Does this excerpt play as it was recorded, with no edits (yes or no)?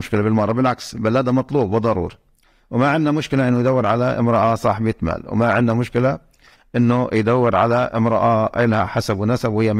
yes